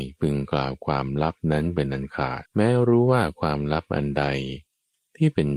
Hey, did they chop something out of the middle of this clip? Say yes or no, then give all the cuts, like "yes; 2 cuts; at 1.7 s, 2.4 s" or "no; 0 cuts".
yes; 1 cut; at 2.5 s